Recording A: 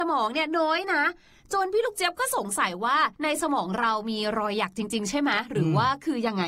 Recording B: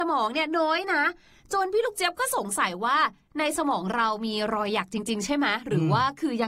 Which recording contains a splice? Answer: A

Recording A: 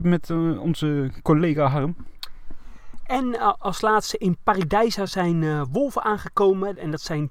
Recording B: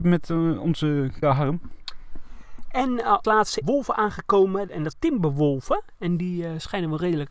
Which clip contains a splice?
B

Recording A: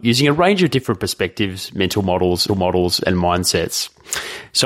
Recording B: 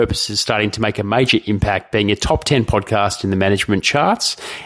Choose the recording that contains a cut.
A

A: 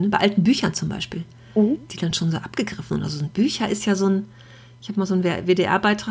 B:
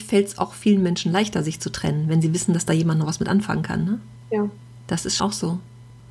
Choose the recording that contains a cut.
B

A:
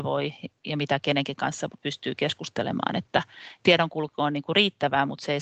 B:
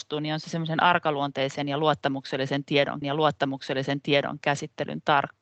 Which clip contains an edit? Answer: B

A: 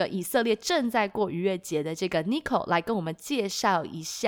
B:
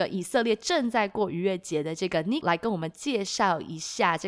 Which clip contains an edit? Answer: B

